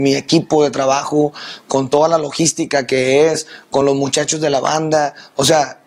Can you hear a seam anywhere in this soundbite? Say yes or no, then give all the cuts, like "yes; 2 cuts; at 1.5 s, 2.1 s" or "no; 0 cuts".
no; 0 cuts